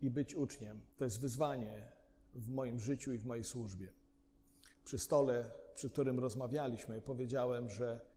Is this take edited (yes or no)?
yes